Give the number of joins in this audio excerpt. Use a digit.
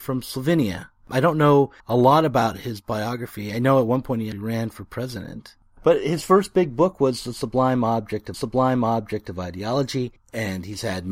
3